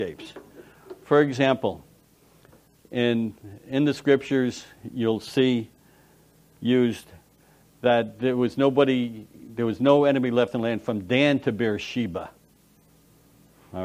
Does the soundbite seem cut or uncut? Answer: uncut